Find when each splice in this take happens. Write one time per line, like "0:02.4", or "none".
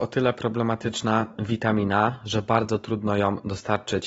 none